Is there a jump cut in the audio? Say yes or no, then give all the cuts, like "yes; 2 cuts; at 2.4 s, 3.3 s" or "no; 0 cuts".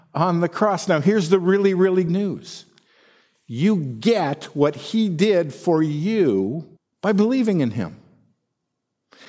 yes; 2 cuts; at 2.1 s, 6.8 s